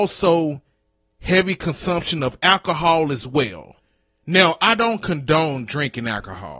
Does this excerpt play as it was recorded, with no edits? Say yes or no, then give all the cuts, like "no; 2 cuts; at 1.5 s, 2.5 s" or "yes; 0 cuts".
yes; 0 cuts